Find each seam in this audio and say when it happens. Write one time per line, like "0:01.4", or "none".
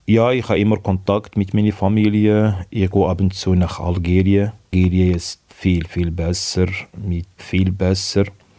0:05.5
0:07.4

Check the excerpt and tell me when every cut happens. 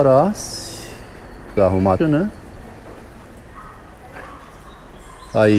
0:01.6
0:02.0

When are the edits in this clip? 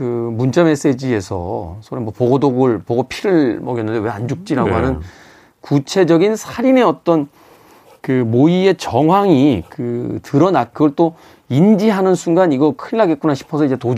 0:10.7

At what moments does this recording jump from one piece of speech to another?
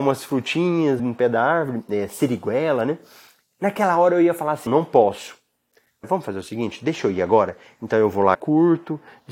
0:01.0
0:04.7
0:06.0
0:08.3

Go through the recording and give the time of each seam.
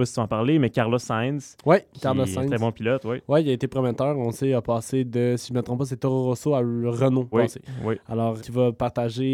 0:07.3
0:08.4

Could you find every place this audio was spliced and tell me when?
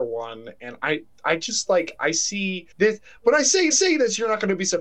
0:02.7
0:03.7

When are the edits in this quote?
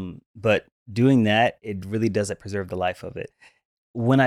none

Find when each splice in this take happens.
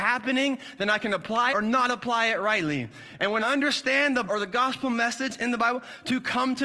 0:01.5
0:03.4
0:04.3

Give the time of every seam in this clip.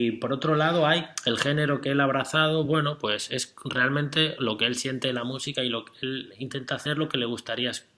none

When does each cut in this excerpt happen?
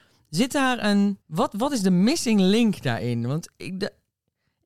0:01.2

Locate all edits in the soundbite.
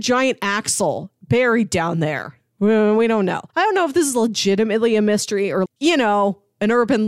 0:03.5
0:05.7

